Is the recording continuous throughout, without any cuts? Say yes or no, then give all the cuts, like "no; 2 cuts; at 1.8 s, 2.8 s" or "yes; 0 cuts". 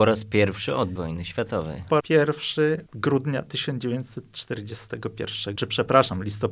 no; 4 cuts; at 1.0 s, 2.0 s, 2.9 s, 5.6 s